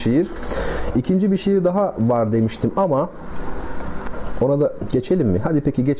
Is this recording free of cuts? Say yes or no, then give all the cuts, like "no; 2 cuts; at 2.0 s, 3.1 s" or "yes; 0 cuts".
yes; 0 cuts